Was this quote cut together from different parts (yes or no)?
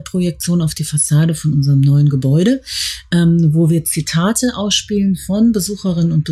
no